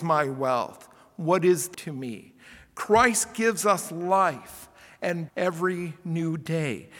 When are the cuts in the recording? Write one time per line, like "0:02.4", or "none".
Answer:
0:01.7
0:05.3